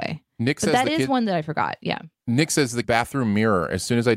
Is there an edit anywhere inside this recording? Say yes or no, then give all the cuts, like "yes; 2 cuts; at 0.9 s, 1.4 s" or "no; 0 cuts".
yes; 1 cut; at 2.8 s